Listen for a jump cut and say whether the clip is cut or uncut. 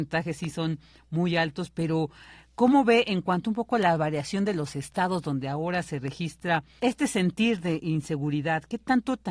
cut